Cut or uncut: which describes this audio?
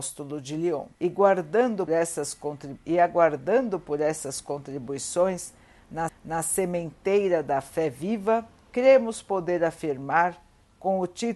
cut